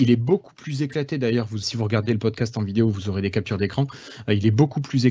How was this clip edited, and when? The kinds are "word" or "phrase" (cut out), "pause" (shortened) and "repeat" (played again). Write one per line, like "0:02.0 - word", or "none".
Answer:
0:01.6 - word